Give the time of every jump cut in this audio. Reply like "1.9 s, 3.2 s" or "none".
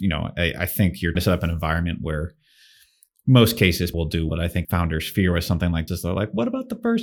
1.2 s, 3.9 s, 4.3 s, 4.6 s, 5.9 s